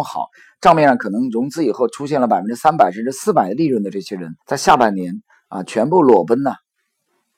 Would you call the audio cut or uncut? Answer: cut